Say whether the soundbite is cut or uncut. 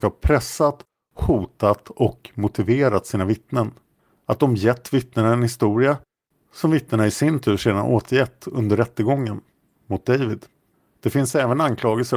uncut